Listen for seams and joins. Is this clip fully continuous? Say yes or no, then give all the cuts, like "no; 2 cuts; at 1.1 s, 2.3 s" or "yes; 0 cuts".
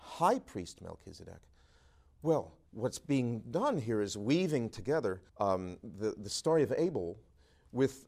no; 2 cuts; at 2.7 s, 5.3 s